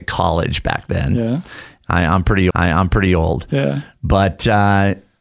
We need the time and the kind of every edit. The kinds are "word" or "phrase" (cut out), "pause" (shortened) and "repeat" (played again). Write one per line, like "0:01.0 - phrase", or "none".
0:02.5 - repeat